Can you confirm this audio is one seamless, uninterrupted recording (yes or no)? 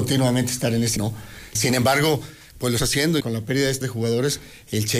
no